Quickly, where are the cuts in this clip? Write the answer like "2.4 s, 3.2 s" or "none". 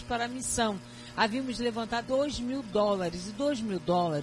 2.0 s